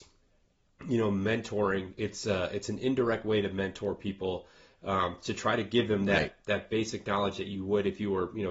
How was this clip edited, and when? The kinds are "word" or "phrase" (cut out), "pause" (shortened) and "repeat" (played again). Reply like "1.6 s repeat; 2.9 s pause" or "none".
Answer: none

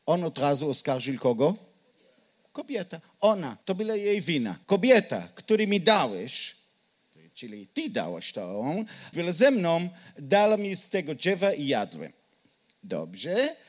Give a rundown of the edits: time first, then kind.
3.6 s pause; 4.6 s pause; 9.1 s word

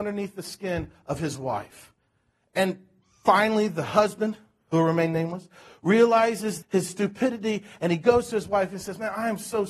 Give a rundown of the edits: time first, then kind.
6.6 s word

